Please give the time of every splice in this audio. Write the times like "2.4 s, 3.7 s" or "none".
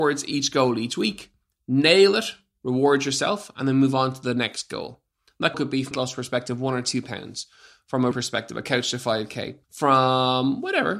5.5 s, 5.9 s, 8.1 s, 9.6 s